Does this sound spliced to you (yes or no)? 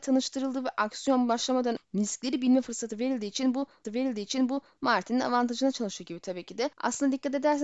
yes